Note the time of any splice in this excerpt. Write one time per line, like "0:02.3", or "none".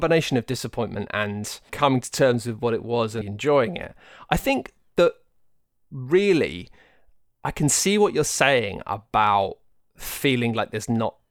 0:03.2